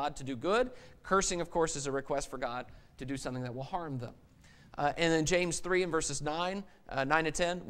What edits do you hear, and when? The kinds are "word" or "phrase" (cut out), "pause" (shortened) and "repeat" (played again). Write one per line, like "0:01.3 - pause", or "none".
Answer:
none